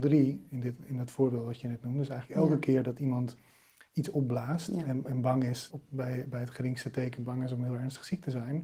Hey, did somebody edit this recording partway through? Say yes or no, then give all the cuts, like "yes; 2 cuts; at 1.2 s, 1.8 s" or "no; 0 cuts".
yes; 1 cut; at 5.7 s